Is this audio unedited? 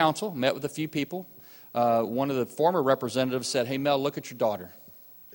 yes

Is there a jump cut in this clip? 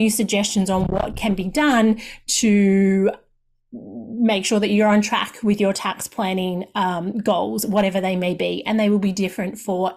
no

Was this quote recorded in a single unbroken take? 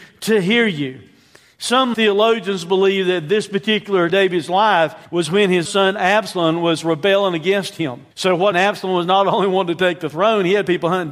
no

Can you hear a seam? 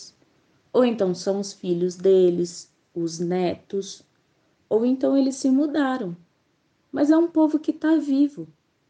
no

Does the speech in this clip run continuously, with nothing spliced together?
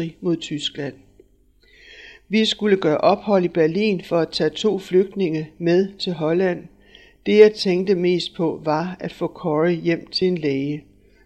yes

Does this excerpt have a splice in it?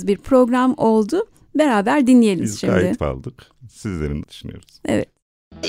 yes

